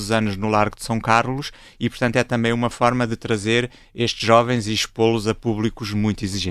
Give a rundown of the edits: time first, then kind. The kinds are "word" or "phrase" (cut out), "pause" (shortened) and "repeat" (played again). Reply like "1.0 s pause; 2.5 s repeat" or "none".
none